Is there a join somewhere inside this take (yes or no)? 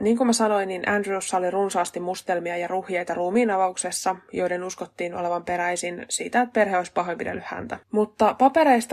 yes